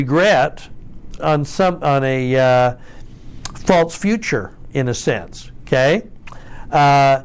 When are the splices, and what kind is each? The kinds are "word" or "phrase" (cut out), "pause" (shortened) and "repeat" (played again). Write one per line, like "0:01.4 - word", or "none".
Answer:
0:01.2 - word